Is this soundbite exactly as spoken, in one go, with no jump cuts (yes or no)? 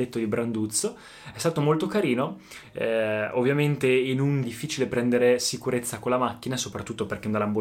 no